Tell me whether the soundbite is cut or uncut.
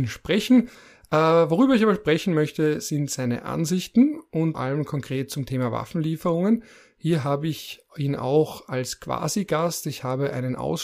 cut